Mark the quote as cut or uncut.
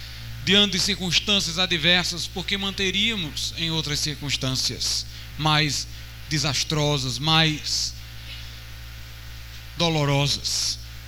uncut